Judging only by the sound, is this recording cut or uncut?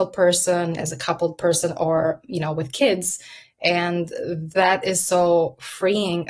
uncut